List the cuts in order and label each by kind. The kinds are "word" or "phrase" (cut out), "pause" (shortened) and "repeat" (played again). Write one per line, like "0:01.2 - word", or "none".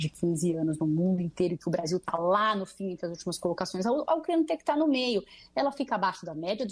none